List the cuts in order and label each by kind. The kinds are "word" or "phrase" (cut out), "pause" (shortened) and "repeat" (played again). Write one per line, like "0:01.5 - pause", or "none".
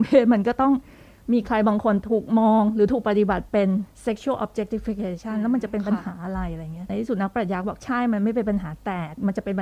0:03.9 - pause

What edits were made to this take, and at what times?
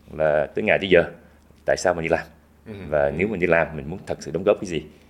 none

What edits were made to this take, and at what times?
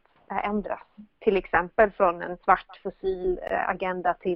0:02.4 - pause

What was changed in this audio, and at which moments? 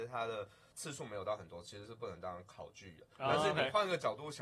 0:03.1 - pause

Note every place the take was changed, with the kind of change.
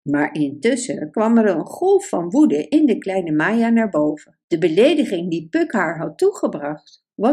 0:04.4 - pause

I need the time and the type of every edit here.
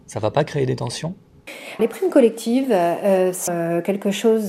0:01.8 - word
0:03.5 - word

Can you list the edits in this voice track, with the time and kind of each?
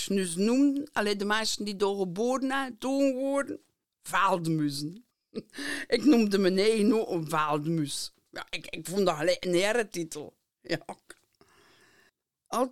none

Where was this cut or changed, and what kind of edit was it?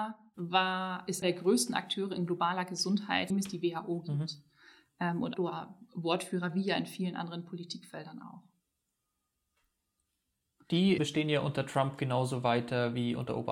0:01.2 - word
0:03.3 - word
0:05.3 - word
0:11.0 - word

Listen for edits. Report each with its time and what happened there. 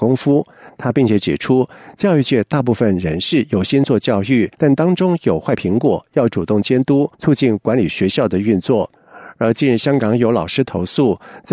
0:04.5 - pause
0:07.1 - pause

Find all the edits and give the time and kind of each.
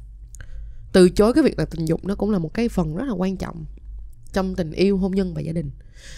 none

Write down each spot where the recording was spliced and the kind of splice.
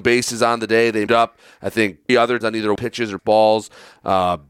0:01.1 - word
0:02.1 - word
0:02.4 - word
0:02.8 - word
0:03.2 - word

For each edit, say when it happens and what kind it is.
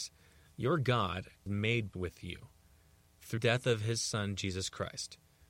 0:01.5 - word
0:01.9 - word
0:03.4 - word

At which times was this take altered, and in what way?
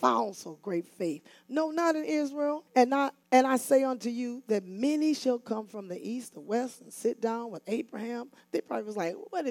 0:02.7 - pause
0:03.2 - pause

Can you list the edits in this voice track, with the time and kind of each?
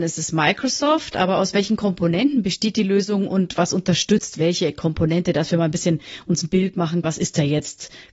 0:07.0 - word

